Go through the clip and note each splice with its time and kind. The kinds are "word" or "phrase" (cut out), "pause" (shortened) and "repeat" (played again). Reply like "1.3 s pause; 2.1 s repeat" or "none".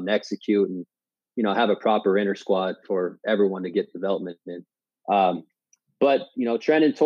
none